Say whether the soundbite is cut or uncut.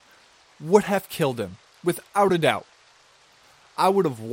uncut